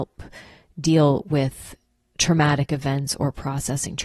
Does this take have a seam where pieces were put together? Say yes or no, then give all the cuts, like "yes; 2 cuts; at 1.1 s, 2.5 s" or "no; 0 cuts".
no; 0 cuts